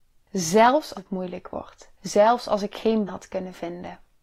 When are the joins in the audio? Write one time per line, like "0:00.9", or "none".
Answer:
0:00.9
0:02.0
0:03.1

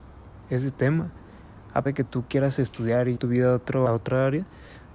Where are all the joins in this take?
0:01.9
0:03.2
0:03.9

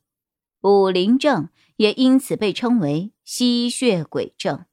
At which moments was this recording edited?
none

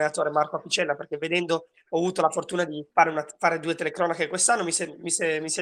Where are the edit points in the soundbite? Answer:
0:02.9

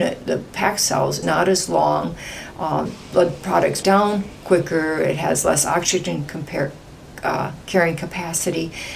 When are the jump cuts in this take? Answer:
0:01.2
0:02.9
0:03.8

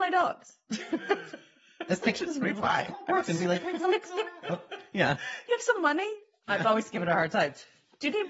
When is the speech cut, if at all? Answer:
none

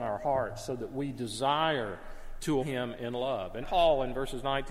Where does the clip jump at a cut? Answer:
0:02.6
0:03.6

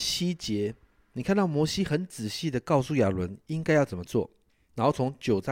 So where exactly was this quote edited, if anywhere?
0:04.5

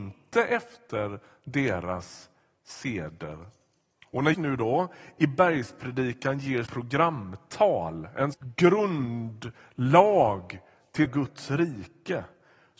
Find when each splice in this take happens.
0:04.3
0:06.7
0:08.3
0:11.1

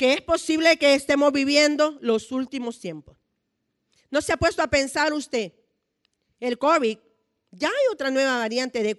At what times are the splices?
none

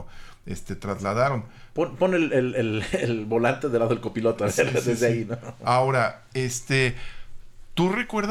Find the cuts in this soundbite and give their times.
none

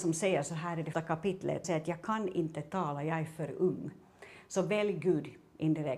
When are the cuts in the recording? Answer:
0:00.9
0:01.6

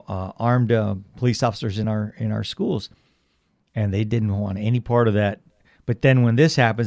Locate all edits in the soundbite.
none

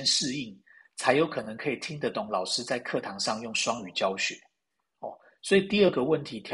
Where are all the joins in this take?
none

